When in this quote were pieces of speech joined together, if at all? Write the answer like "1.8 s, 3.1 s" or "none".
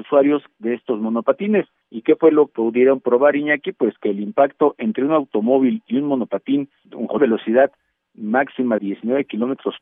2.5 s, 7.2 s, 8.8 s